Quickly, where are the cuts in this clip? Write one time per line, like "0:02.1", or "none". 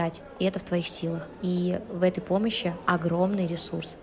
none